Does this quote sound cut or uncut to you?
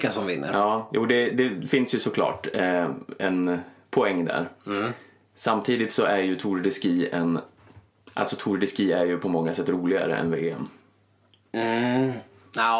uncut